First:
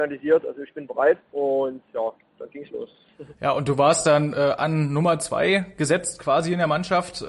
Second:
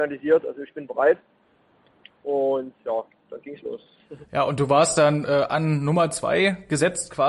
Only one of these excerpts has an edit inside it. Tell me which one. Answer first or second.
first